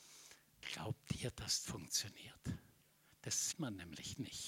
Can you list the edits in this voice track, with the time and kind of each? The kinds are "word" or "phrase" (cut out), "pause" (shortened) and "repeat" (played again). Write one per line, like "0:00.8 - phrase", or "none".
0:01.6 - word
0:03.5 - word

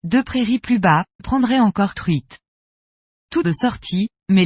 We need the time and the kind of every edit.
0:01.2 - word
0:01.9 - word
0:03.4 - phrase

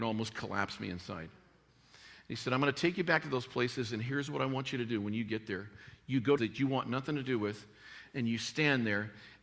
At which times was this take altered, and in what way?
0:06.4 - phrase

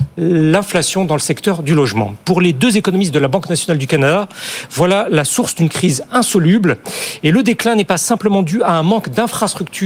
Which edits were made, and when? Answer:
none

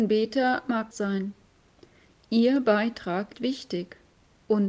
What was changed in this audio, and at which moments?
0:00.9 - phrase
0:03.3 - word

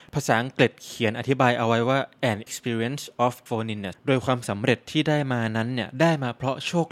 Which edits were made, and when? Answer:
0:02.5 - word
0:03.5 - word
0:03.9 - word

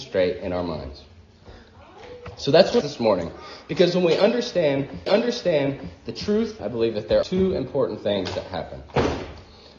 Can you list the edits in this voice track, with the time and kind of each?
0:02.8 - phrase
0:05.1 - repeat
0:06.6 - phrase
0:07.2 - word

